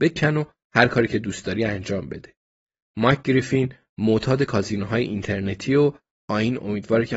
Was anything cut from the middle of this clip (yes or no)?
no